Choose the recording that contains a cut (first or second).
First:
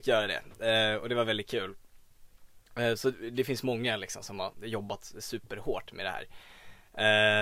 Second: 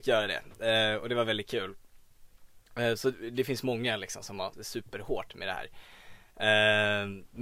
second